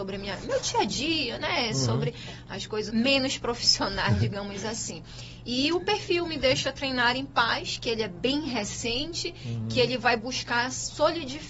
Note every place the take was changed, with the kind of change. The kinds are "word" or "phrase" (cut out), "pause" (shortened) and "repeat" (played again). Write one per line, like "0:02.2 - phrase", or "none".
0:02.9 - word